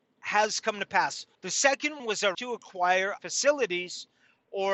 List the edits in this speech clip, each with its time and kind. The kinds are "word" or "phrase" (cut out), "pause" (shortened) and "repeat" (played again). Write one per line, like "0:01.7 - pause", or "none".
0:01.3 - pause
0:02.0 - word
0:02.3 - word
0:03.2 - word